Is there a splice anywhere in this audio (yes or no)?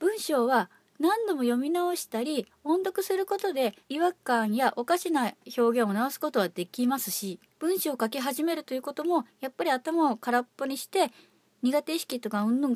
yes